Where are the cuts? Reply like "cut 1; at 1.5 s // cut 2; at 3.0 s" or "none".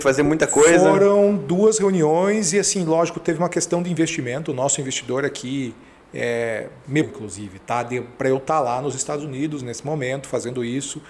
cut 1; at 7.0 s